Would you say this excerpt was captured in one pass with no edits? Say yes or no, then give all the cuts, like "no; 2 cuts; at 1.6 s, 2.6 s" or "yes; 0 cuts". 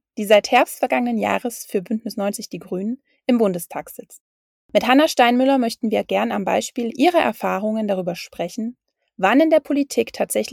yes; 0 cuts